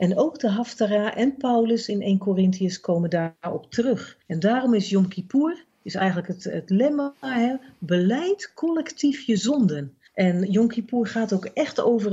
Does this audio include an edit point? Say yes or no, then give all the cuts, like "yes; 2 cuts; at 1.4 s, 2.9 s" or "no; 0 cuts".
yes; 2 cuts; at 4.2 s, 10.1 s